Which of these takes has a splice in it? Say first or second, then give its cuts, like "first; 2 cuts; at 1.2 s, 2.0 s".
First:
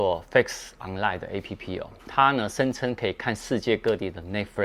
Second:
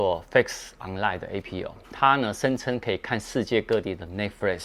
second; 1 cut; at 1.4 s